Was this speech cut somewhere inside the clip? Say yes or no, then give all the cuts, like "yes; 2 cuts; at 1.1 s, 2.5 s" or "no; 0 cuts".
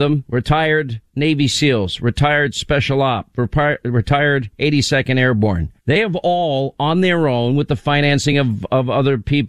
no; 0 cuts